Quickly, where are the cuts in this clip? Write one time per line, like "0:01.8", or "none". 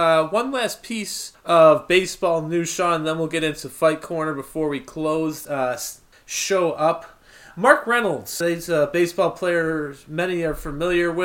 0:01.3
0:05.4
0:06.1
0:08.4